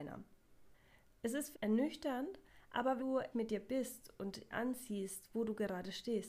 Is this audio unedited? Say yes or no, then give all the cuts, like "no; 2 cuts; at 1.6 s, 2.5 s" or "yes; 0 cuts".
no; 4 cuts; at 1.5 s, 3.0 s, 3.3 s, 4.5 s